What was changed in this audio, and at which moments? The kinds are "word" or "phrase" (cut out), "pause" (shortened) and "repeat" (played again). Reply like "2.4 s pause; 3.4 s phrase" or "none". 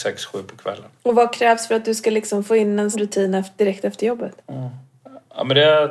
0.9 s pause; 2.9 s word; 4.4 s pause

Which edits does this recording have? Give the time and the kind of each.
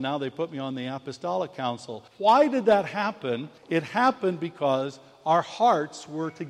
2.1 s pause; 3.6 s pause

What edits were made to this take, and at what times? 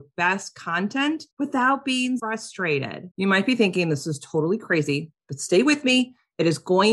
1.3 s pause; 2.2 s word

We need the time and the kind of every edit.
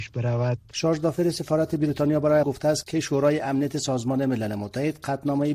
2.4 s word

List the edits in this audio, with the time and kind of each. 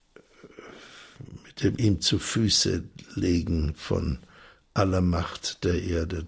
none

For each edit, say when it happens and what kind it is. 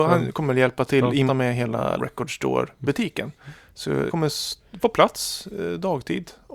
1.3 s phrase; 2.0 s word; 4.1 s word; 4.8 s word

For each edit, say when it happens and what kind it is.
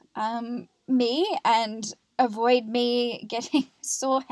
none

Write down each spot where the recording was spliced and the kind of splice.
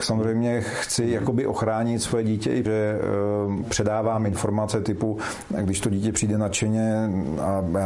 2.7 s phrase; 3.6 s phrase

